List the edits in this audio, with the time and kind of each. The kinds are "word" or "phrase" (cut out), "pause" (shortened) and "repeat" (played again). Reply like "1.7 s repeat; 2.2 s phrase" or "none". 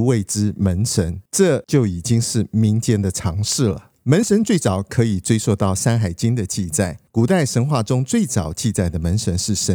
1.3 s pause; 4.0 s pause; 7.1 s pause

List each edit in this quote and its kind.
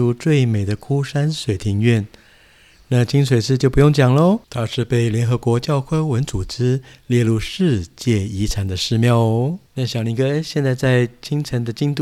4.4 s pause; 9.7 s pause

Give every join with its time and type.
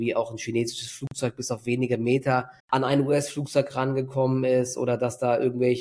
2.6 s pause

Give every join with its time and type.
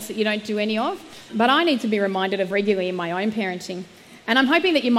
1.3 s word; 2.5 s word

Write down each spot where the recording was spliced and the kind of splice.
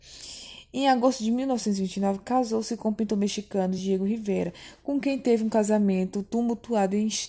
none

